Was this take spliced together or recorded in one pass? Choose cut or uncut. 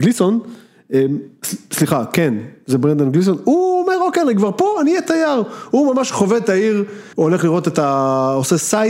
cut